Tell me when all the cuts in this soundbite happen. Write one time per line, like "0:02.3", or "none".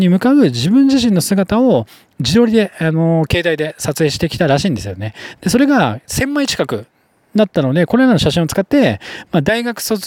none